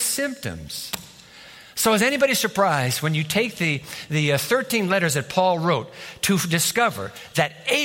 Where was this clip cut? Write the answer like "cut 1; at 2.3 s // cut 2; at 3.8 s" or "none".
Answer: none